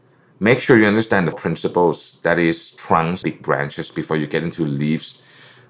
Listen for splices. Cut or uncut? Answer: cut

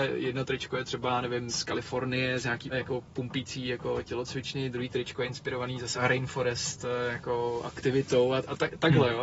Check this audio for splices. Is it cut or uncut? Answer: cut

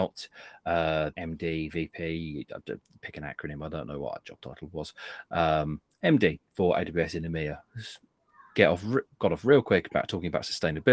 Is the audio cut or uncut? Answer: cut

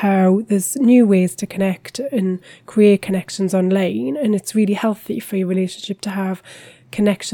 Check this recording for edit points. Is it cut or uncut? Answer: uncut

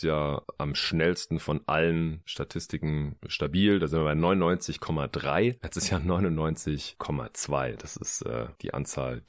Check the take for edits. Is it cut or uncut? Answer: uncut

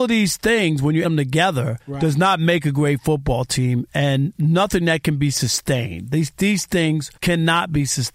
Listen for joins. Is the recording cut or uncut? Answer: cut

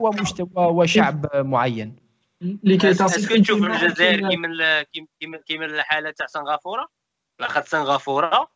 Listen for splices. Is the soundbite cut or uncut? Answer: uncut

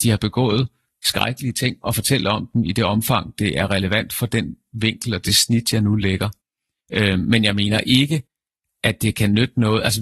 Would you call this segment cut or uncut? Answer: uncut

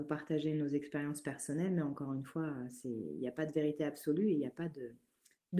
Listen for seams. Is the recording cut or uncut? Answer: uncut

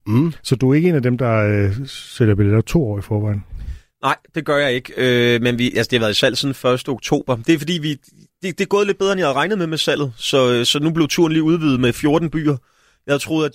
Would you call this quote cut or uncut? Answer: uncut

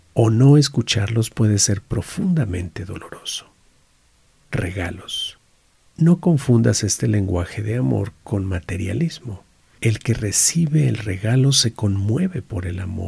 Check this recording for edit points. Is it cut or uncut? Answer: uncut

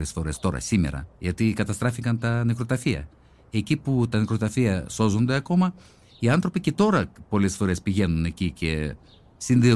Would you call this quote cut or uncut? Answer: uncut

